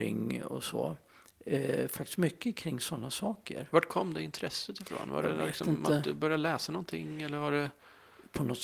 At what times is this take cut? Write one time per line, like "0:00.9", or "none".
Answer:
none